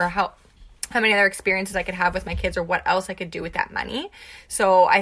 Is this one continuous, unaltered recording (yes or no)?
yes